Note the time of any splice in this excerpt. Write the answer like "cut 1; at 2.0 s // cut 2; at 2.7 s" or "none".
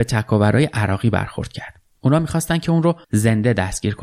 cut 1; at 3.0 s